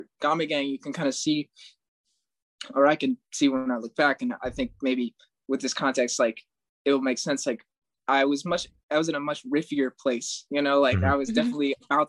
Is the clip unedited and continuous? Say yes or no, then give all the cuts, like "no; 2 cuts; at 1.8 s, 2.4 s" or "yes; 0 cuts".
yes; 0 cuts